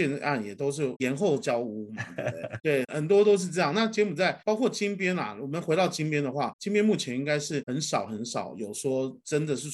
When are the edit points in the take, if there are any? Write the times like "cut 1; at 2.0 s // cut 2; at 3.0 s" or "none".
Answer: cut 1; at 4.4 s